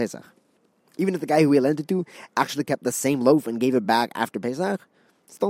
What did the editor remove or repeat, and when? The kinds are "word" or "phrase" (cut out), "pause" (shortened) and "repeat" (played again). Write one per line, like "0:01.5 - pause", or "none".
none